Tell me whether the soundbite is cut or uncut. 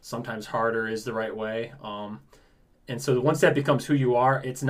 uncut